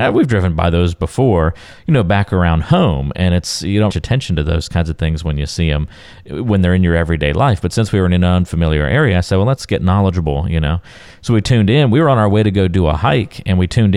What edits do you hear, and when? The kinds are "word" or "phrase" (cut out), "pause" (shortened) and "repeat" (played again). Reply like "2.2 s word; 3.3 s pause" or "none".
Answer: 3.9 s phrase